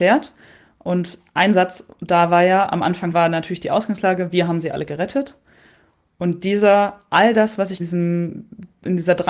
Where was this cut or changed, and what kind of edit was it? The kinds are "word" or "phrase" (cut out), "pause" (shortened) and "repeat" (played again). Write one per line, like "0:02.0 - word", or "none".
0:07.8 - phrase